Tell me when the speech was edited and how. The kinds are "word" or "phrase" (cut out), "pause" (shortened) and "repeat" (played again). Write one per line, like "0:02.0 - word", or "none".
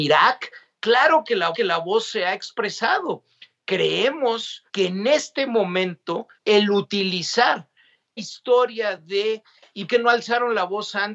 0:01.5 - repeat
0:04.7 - pause
0:06.4 - pause
0:08.2 - word
0:09.9 - word